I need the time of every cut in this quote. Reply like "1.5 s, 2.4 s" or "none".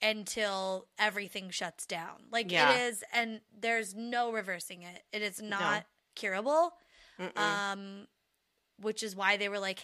none